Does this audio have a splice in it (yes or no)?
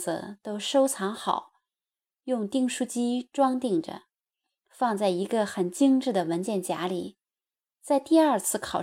no